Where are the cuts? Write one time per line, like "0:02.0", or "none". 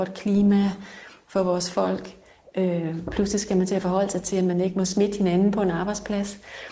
none